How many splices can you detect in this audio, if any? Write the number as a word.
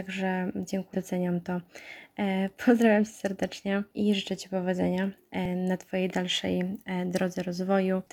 one